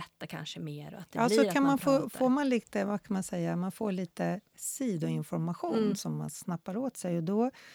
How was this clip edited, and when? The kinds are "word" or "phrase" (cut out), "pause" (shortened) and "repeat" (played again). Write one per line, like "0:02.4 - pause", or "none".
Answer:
none